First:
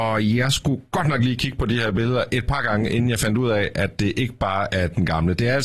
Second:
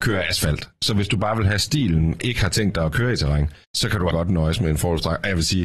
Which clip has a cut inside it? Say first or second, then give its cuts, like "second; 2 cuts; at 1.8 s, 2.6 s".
second; 3 cuts; at 2.2 s, 3.6 s, 4.1 s